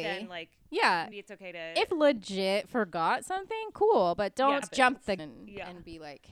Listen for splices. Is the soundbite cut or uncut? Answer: cut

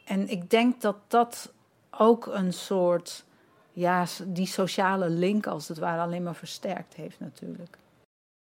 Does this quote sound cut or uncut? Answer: uncut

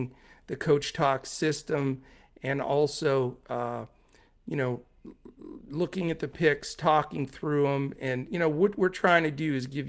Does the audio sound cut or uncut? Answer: uncut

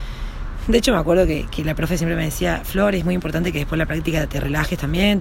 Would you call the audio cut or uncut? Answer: uncut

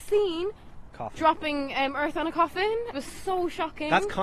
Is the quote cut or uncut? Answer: cut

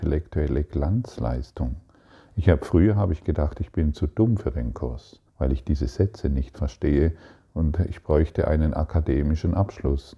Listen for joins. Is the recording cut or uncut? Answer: cut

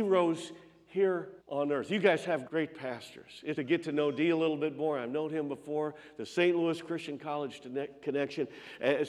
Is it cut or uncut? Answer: cut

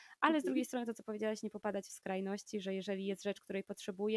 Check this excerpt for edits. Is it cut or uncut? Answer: uncut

